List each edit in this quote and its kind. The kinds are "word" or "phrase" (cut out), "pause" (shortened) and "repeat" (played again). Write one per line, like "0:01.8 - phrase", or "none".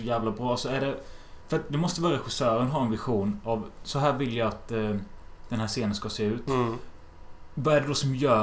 none

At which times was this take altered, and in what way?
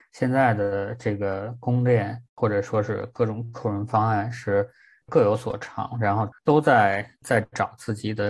0:02.3 - pause
0:06.4 - pause

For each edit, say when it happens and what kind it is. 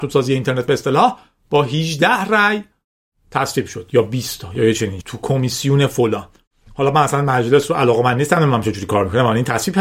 0:05.0 - word

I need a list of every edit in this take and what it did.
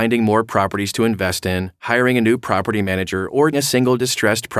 0:03.5 - word

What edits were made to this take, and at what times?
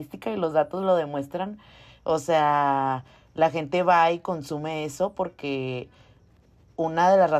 none

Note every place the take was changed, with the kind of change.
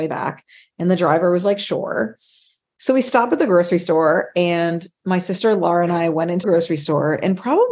0:06.4 - word

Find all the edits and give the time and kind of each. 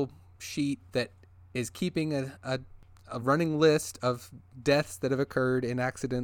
none

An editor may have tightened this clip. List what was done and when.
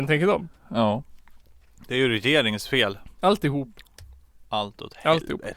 none

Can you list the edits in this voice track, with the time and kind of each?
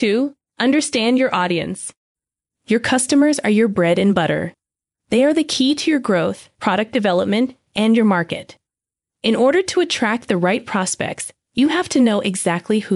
0:06.5 - pause
0:07.7 - pause

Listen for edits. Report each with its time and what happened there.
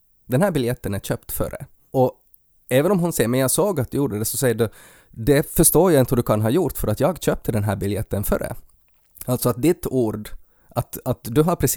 none

